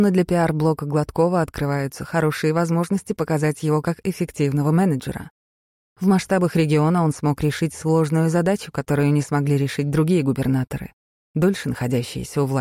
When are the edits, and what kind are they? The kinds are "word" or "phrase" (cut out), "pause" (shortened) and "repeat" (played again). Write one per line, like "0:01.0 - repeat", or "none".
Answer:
none